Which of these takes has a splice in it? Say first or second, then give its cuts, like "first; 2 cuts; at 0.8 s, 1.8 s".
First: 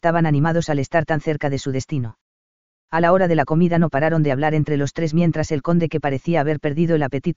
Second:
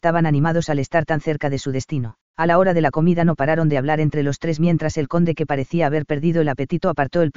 second; 1 cut; at 2.3 s